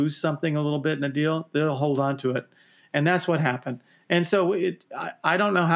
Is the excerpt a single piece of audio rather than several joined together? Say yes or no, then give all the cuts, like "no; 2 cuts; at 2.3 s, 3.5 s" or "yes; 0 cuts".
yes; 0 cuts